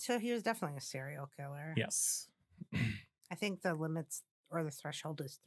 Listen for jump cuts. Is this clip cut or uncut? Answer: uncut